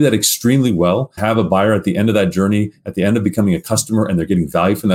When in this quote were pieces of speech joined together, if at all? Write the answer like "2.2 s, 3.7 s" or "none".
1.2 s